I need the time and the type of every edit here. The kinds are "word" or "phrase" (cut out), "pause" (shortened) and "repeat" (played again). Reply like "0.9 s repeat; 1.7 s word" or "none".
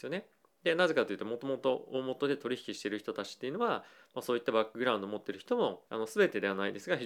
5.9 s pause